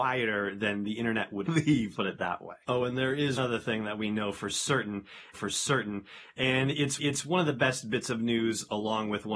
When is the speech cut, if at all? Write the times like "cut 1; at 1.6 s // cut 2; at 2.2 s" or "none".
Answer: cut 1; at 1.4 s // cut 2; at 1.9 s // cut 3; at 2.6 s // cut 4; at 3.4 s // cut 5; at 5.3 s // cut 6; at 7.0 s